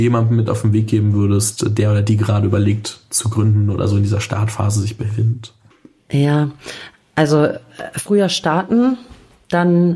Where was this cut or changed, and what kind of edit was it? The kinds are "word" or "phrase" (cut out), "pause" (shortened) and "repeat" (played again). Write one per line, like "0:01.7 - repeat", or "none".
none